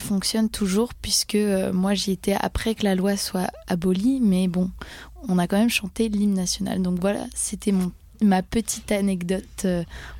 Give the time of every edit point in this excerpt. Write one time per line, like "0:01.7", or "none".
none